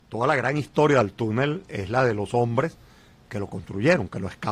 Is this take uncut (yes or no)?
yes